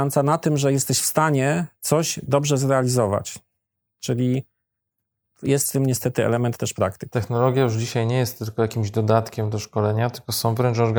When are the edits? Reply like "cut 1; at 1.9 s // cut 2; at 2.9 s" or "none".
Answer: none